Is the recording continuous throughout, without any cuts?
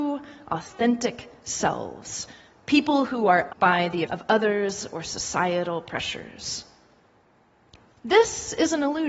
no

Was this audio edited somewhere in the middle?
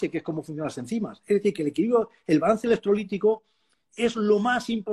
no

